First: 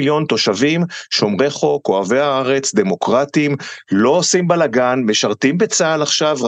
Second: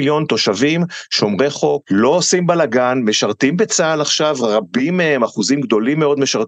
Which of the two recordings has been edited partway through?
second; 1 cut; at 1.8 s

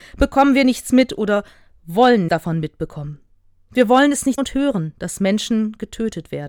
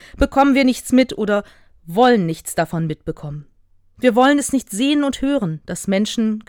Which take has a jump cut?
first; 2 cuts; at 2.3 s, 4.4 s

